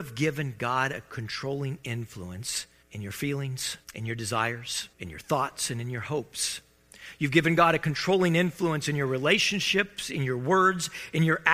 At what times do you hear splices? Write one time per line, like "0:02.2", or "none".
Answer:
0:02.8
0:03.8
0:04.9